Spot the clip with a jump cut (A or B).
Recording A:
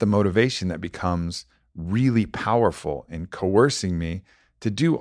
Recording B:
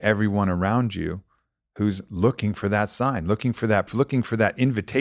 B